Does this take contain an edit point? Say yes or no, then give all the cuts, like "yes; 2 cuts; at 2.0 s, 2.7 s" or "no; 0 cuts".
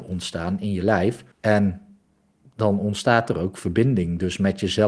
yes; 1 cut; at 1.3 s